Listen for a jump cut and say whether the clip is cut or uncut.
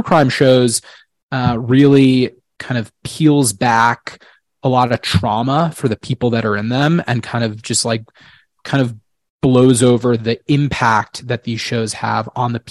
uncut